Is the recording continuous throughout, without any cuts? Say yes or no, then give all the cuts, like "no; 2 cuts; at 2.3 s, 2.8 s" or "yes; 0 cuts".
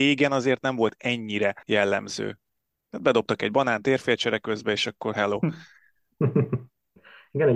no; 1 cut; at 1.6 s